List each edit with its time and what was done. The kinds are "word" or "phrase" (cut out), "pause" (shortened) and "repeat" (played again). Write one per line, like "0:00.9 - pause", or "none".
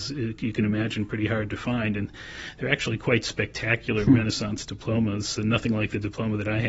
none

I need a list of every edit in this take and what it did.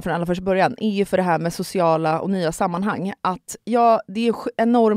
none

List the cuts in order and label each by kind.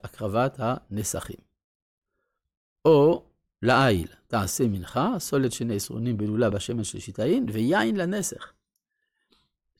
none

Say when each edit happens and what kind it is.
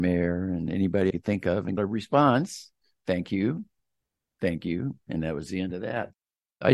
0:01.1 - word
0:01.8 - word

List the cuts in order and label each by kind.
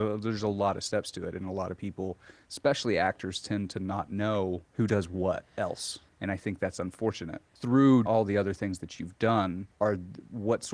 0:08.1 - word

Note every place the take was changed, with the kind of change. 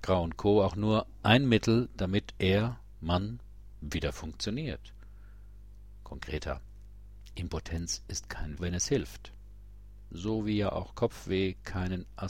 0:08.6 - phrase

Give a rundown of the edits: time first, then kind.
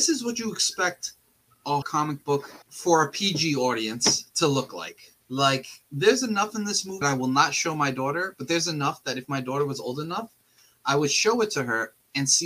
0:01.8 - word
0:02.6 - pause
0:05.2 - pause
0:07.0 - word

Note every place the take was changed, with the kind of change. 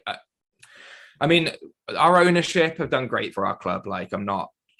0:03.3 - word

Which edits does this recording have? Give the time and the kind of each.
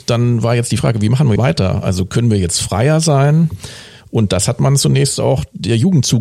0:01.4 - word

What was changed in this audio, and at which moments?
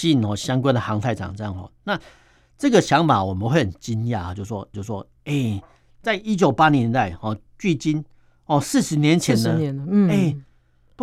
0:04.7 - repeat
0:07.5 - pause

